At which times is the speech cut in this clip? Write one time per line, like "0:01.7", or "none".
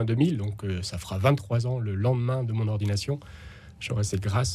none